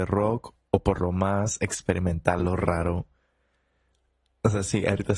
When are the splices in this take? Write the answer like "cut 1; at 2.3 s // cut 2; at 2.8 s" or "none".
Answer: none